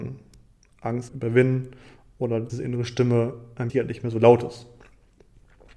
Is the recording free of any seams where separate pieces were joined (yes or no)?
no